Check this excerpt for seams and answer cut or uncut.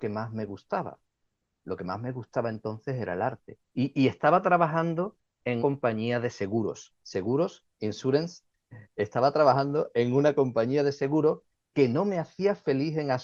cut